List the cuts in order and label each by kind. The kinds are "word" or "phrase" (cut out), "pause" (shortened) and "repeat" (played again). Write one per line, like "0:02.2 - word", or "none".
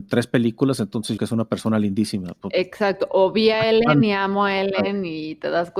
0:01.2 - word